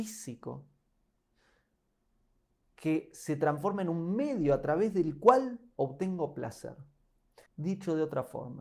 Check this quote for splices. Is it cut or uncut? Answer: cut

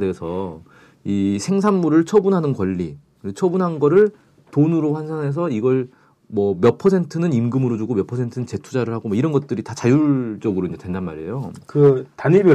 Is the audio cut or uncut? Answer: uncut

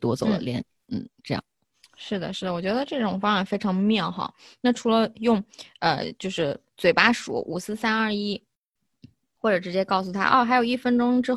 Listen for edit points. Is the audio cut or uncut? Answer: uncut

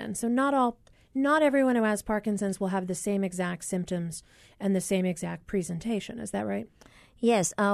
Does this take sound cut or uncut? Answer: uncut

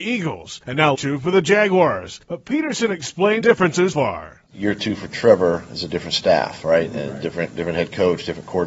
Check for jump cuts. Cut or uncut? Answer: cut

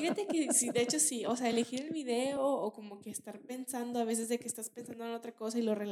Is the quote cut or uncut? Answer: uncut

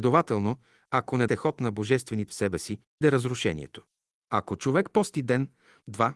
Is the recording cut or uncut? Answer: cut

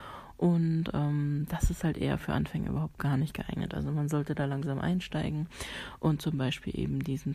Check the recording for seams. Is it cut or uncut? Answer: uncut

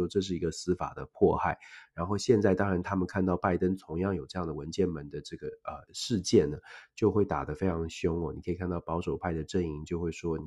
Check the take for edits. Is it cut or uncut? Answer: cut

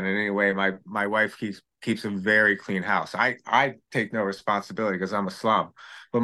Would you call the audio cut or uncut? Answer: uncut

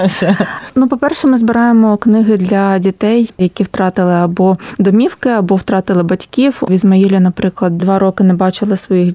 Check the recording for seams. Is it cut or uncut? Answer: cut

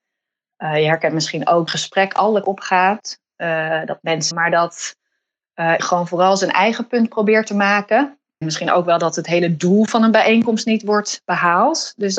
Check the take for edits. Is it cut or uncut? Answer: cut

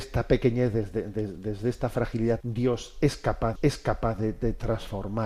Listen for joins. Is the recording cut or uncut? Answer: cut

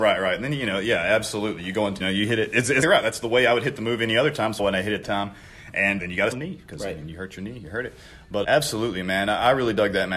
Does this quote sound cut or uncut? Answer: cut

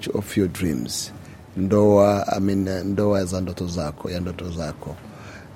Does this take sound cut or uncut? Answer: uncut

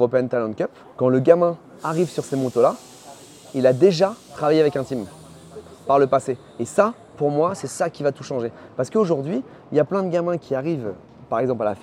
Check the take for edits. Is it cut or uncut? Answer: uncut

